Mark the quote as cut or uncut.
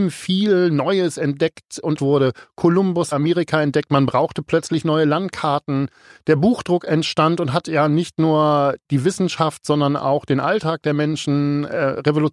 cut